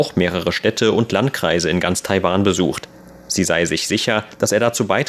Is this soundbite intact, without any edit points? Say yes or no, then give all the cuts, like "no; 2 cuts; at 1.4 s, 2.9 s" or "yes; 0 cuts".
yes; 0 cuts